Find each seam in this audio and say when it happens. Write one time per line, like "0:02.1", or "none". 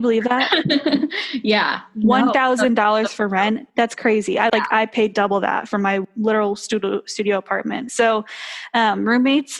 0:03.7
0:04.5